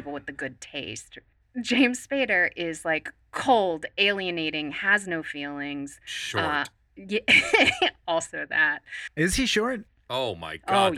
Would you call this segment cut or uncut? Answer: uncut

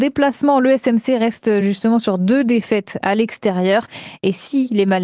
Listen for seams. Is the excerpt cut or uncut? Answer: uncut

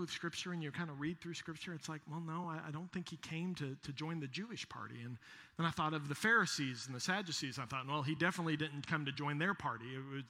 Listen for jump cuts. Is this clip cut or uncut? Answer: uncut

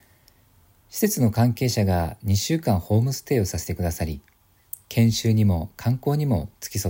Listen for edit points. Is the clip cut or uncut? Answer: uncut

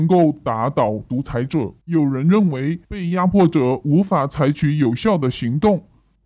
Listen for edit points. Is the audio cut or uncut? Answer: cut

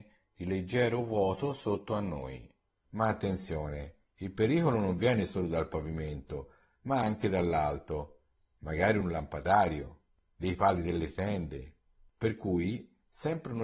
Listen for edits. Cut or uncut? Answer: uncut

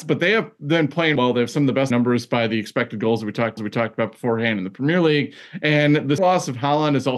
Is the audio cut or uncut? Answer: cut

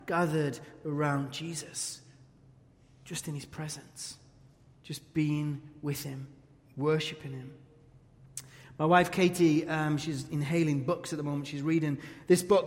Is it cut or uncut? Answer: uncut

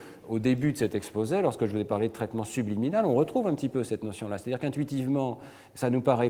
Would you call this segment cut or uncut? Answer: uncut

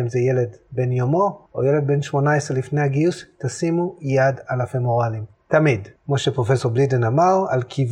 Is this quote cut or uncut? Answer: cut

